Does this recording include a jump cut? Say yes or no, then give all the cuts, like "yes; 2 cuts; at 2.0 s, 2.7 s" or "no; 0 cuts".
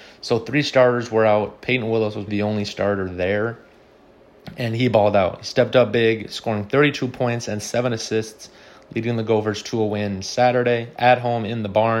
yes; 1 cut; at 2.3 s